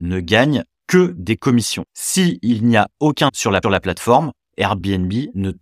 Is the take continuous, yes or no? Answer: no